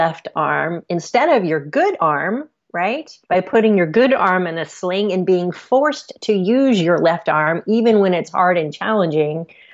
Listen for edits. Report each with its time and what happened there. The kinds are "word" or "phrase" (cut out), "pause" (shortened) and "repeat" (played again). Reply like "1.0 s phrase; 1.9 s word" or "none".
3.2 s pause